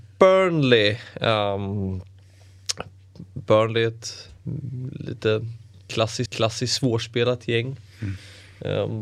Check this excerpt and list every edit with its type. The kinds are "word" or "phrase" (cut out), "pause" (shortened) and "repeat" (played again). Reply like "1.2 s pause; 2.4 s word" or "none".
6.3 s repeat